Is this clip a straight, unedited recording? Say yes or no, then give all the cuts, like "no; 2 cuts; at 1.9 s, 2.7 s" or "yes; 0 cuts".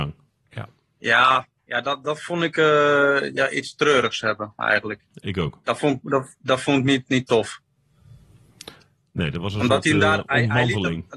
yes; 0 cuts